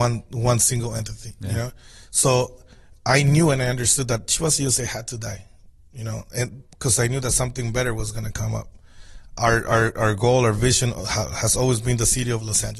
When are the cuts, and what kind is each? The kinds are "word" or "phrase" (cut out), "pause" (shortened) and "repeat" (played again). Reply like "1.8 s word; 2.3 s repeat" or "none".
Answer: none